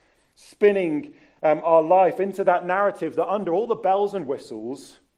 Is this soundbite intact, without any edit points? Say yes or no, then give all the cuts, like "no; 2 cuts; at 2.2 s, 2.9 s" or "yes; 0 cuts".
yes; 0 cuts